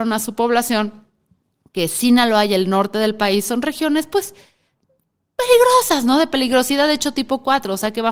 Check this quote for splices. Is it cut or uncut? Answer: uncut